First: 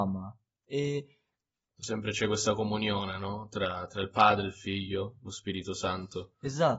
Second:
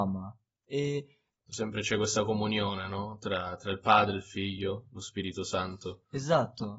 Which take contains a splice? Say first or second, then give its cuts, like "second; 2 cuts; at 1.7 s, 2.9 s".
second; 1 cut; at 1.3 s